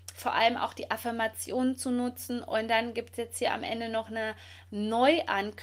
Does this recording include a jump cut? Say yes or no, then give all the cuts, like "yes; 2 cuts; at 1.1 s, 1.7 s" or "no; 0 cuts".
no; 0 cuts